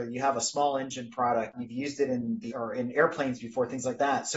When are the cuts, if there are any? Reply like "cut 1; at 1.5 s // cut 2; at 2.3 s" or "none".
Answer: cut 1; at 2.5 s